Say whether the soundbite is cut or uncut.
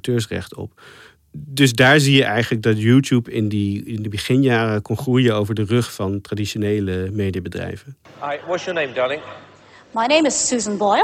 uncut